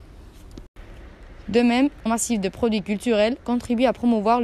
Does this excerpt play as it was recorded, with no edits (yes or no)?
no